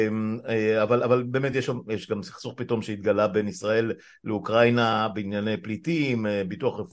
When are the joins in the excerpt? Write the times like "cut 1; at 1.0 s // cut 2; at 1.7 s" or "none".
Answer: none